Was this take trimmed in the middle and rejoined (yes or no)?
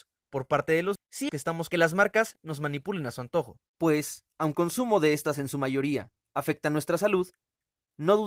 yes